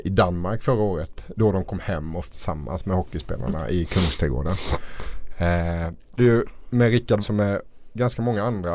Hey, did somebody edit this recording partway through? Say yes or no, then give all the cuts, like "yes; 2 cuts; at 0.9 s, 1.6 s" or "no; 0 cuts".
yes; 4 cuts; at 1.4 s, 2.3 s, 6.2 s, 7.2 s